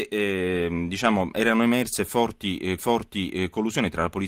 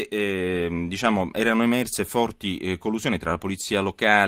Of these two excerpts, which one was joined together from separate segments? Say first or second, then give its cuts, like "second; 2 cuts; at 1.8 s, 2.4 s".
first; 1 cut; at 2.8 s